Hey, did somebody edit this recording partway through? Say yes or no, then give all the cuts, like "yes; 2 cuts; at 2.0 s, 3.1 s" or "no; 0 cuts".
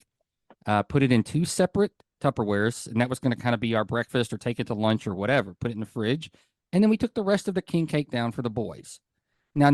no; 0 cuts